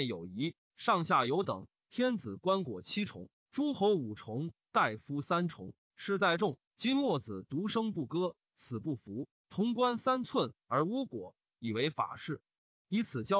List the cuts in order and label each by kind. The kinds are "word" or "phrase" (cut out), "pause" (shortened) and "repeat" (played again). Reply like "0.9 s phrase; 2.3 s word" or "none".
6.7 s pause